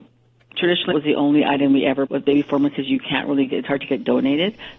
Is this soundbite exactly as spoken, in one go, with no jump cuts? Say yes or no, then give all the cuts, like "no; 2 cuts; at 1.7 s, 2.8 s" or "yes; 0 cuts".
no; 2 cuts; at 0.9 s, 2.1 s